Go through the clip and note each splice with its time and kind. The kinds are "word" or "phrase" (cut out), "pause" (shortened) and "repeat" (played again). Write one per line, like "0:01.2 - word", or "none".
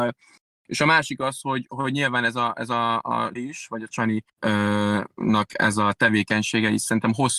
0:03.4 - phrase
0:04.3 - pause